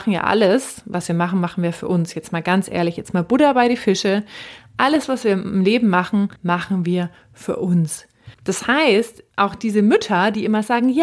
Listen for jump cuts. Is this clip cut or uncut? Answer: cut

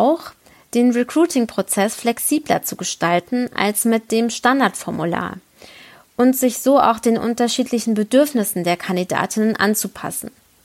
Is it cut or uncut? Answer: uncut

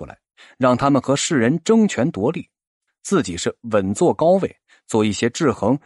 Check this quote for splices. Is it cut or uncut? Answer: cut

